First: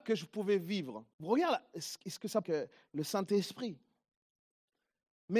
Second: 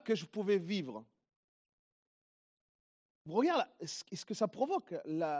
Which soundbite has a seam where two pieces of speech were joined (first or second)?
first